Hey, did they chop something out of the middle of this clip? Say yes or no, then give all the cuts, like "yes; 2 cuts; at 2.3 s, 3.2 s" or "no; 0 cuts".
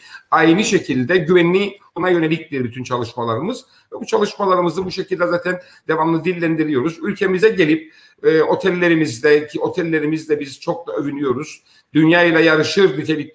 no; 0 cuts